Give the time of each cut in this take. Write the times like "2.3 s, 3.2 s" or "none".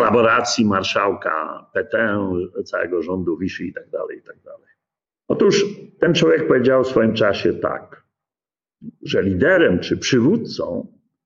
none